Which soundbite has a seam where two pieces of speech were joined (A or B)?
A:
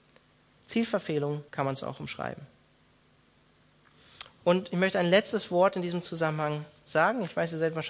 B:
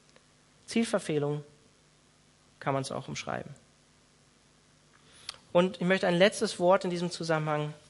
A